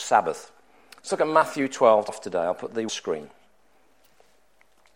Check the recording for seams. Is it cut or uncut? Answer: cut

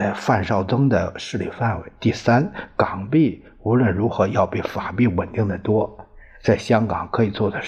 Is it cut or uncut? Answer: uncut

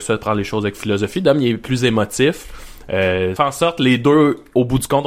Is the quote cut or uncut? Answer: cut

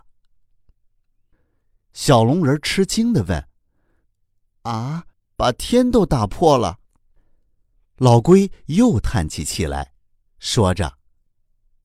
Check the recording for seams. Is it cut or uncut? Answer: cut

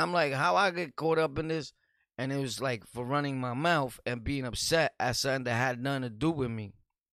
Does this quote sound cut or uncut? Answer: uncut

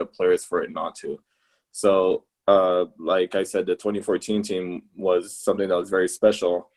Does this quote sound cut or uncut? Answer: uncut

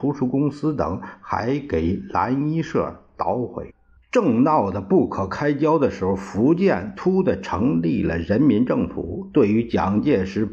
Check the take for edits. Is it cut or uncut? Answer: cut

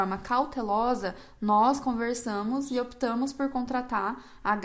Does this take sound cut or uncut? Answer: uncut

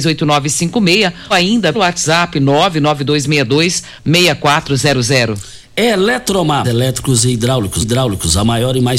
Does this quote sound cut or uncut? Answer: cut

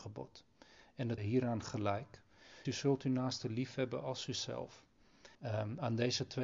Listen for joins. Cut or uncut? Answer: cut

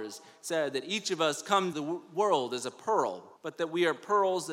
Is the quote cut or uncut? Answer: cut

